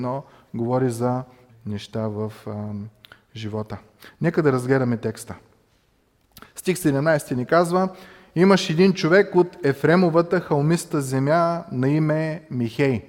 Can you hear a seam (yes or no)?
yes